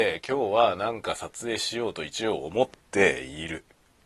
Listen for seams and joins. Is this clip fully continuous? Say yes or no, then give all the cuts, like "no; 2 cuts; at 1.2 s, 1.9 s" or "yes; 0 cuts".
no; 1 cut; at 2.8 s